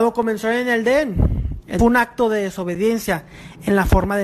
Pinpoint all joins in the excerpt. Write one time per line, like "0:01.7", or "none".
0:01.8